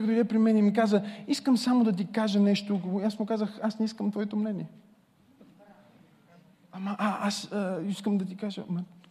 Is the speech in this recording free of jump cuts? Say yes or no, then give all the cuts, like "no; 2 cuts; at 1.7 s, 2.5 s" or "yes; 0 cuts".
yes; 0 cuts